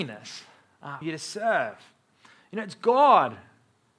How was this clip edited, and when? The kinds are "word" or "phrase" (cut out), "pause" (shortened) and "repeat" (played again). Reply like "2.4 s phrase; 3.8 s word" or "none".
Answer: 1.0 s word